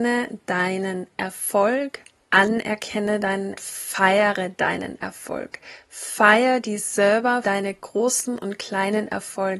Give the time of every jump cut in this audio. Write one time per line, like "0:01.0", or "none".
0:03.6
0:07.4